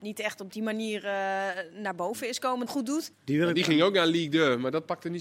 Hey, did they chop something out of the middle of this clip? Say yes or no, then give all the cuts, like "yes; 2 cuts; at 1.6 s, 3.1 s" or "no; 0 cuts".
yes; 2 cuts; at 2.7 s, 3.1 s